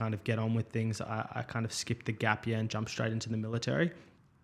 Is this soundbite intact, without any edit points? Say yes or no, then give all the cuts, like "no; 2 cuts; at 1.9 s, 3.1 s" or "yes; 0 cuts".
yes; 0 cuts